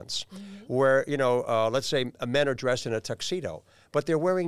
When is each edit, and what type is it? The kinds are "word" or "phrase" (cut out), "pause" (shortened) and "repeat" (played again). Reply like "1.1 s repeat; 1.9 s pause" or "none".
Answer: none